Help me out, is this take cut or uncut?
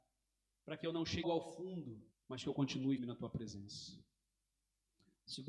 cut